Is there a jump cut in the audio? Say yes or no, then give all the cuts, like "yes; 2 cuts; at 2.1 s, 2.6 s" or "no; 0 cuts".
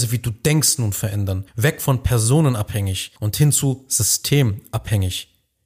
yes; 2 cuts; at 1.5 s, 3.2 s